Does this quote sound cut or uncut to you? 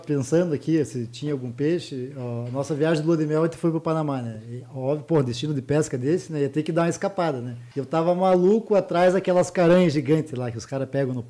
cut